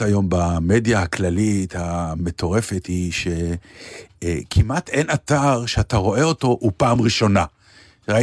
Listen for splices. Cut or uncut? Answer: uncut